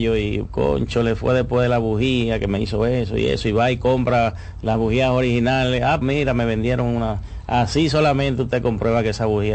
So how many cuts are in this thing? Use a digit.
1